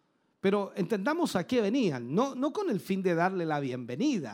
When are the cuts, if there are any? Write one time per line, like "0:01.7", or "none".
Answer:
none